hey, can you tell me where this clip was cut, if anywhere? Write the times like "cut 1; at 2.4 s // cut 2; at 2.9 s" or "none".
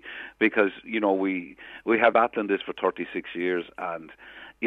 cut 1; at 2.1 s